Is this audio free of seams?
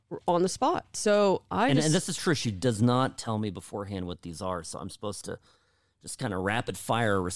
yes; 0 cuts

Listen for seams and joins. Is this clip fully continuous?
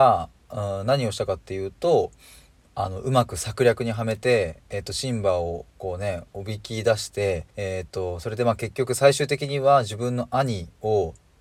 no; 1 cut; at 7.5 s

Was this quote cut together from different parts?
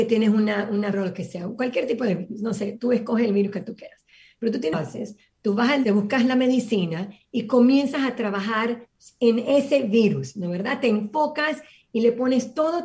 yes; 3 cuts; at 0.9 s, 4.7 s, 5.8 s

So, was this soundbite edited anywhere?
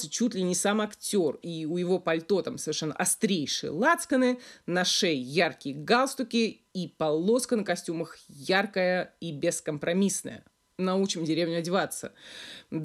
no; 0 cuts

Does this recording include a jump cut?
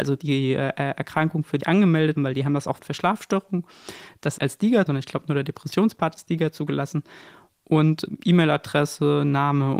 yes; 6 cuts; at 1.6 s, 2.2 s, 2.8 s, 4.4 s, 4.9 s, 8.1 s

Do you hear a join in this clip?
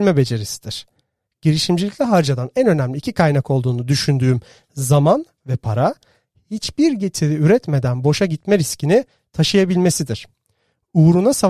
no; 0 cuts

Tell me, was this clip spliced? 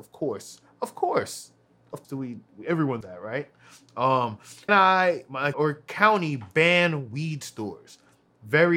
yes; 4 cuts; at 2.0 s, 3.0 s, 4.7 s, 5.5 s

